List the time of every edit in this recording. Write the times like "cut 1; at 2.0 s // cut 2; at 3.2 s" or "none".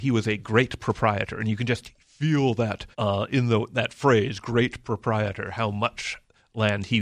cut 1; at 2.9 s